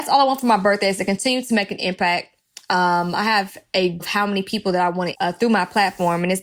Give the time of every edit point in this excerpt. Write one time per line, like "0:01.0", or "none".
0:04.0
0:05.1